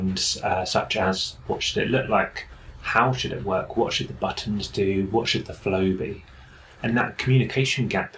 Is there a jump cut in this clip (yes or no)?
no